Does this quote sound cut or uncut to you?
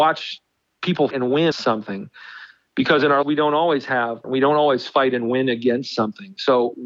cut